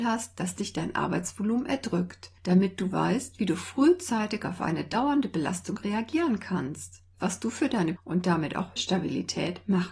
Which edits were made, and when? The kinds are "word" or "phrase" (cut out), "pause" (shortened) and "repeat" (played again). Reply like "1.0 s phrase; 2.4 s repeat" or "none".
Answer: 7.1 s word; 8.0 s word; 8.8 s word